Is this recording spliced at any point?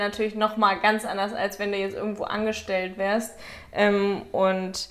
no; 0 cuts

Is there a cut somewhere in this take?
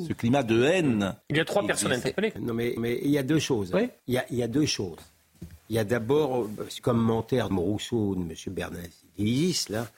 yes; 7 cuts; at 1.2 s, 2.4 s, 2.8 s, 4.0 s, 5.6 s, 6.8 s, 7.5 s

